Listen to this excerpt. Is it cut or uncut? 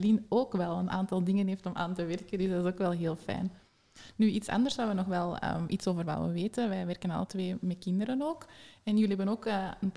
uncut